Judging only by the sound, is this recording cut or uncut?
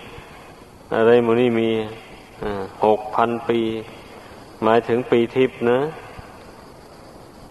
uncut